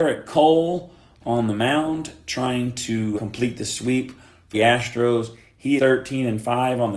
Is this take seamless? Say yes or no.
no